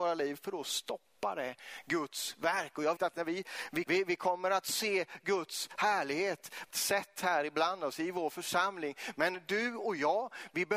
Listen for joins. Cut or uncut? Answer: cut